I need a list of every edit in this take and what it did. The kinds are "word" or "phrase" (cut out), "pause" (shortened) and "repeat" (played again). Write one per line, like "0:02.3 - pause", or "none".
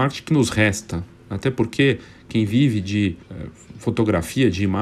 0:03.2 - pause

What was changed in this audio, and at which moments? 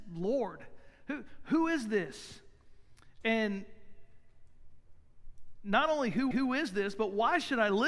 0:06.3 - repeat

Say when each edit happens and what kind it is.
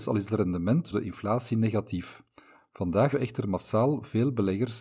0:00.9 - word
0:03.1 - word

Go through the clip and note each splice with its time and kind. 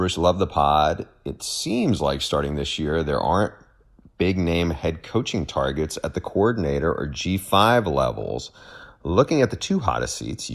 none

